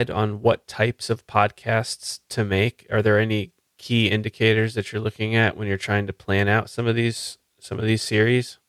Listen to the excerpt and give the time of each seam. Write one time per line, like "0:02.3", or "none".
none